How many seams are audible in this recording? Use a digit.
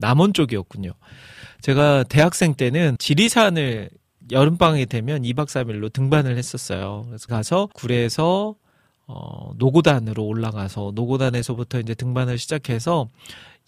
3